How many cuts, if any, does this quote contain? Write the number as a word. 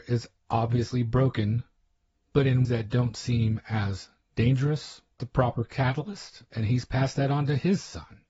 two